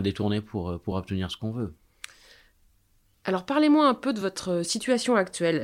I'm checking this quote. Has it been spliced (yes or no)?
no